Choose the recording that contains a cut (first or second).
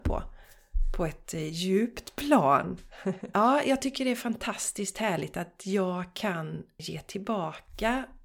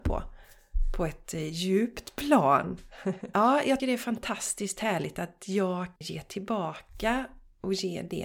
second